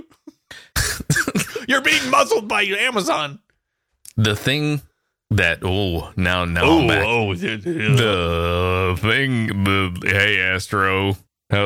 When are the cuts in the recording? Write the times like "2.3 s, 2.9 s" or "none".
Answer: none